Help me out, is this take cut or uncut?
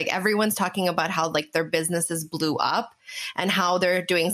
uncut